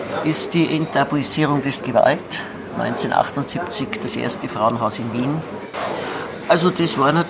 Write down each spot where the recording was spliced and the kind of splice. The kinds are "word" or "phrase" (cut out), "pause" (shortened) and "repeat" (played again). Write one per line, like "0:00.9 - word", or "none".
0:01.8 - word